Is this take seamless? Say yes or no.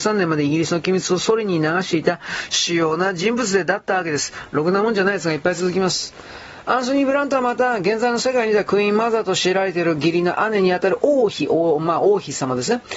yes